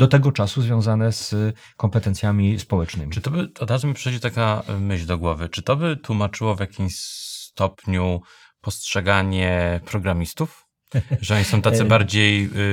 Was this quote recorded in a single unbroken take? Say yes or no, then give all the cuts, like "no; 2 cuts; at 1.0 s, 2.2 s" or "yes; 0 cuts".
yes; 0 cuts